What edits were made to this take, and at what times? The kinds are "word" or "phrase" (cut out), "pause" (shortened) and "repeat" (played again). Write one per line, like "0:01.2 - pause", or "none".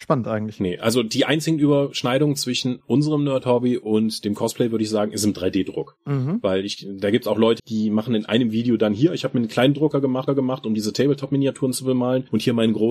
0:07.6 - word
0:10.3 - repeat